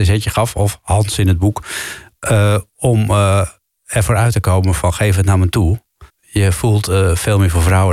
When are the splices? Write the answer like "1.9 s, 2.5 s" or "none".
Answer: 6.1 s